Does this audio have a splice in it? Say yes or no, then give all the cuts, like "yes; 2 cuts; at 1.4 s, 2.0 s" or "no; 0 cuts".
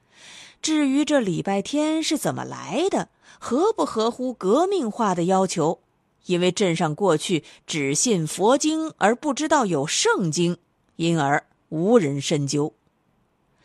no; 0 cuts